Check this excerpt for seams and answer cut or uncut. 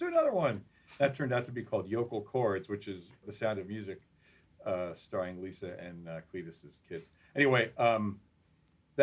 uncut